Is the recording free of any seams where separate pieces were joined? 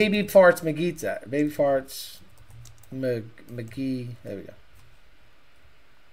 yes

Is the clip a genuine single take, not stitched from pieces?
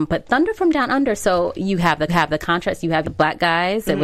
no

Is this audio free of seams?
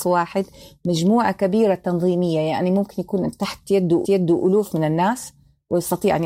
no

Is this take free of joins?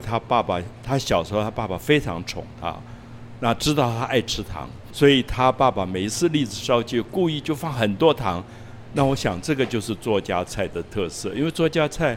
no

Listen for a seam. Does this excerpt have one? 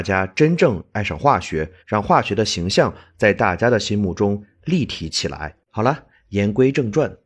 yes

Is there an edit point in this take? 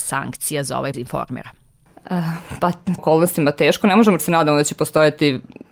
yes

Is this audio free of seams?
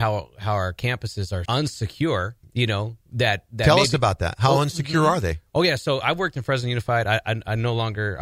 no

